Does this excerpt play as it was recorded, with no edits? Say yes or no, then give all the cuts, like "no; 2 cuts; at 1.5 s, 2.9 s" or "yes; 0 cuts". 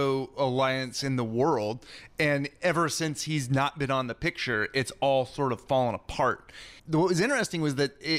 no; 1 cut; at 6.8 s